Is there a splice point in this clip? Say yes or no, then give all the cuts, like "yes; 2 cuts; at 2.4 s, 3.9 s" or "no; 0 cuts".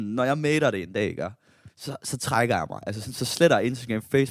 no; 0 cuts